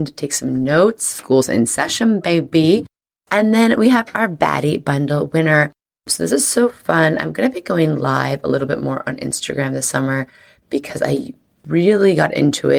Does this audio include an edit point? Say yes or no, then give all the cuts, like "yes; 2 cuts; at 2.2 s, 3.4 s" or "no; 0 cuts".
no; 0 cuts